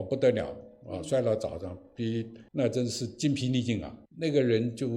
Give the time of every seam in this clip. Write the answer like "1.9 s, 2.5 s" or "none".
2.5 s, 4.1 s